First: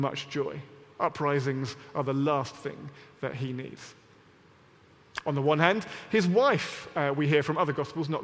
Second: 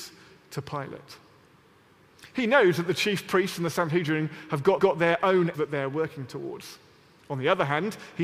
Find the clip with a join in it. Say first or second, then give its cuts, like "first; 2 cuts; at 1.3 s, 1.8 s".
second; 2 cuts; at 4.8 s, 5.5 s